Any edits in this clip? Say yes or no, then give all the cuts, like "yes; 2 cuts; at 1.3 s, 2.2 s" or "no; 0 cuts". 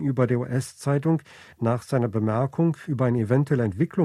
no; 0 cuts